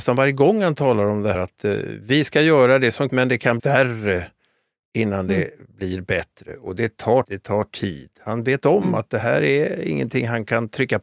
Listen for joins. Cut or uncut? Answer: cut